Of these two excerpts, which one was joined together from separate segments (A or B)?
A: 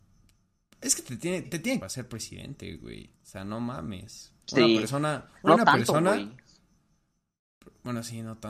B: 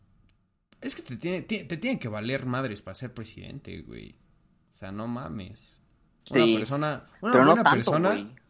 A